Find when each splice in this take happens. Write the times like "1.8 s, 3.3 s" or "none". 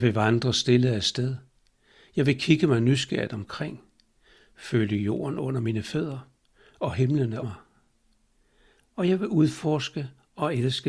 7.4 s